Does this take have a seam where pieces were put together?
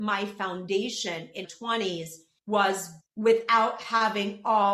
yes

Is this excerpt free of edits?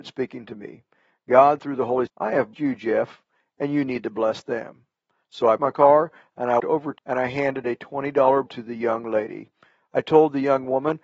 no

